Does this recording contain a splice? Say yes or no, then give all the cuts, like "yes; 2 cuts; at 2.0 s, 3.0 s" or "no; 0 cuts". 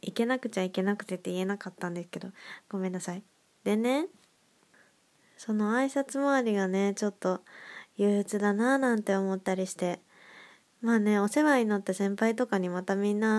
no; 0 cuts